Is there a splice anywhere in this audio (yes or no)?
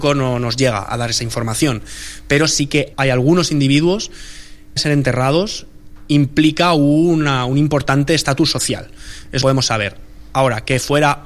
yes